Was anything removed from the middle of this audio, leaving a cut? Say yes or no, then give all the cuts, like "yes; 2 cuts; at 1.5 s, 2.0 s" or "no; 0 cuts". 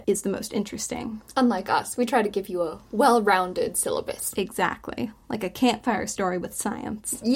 no; 0 cuts